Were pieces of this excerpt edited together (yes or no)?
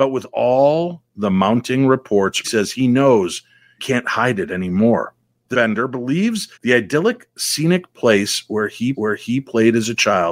yes